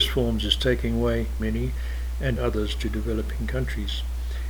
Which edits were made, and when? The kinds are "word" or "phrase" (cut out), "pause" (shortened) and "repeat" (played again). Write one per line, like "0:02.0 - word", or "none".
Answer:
0:01.4 - phrase
0:02.4 - word